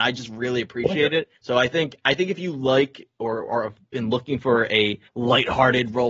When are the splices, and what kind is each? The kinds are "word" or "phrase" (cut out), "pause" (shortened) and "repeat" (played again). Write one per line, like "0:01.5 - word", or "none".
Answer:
0:01.4 - pause
0:05.1 - pause